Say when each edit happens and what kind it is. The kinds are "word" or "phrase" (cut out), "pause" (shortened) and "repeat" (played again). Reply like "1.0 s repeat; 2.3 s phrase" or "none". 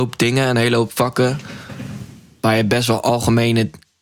none